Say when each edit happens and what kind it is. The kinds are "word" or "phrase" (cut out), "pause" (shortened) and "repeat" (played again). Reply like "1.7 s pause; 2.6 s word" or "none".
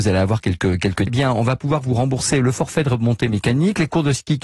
1.1 s word